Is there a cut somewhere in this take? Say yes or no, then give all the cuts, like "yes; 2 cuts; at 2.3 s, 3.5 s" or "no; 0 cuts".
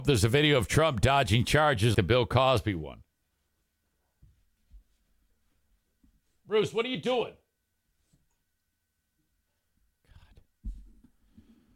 yes; 1 cut; at 1.9 s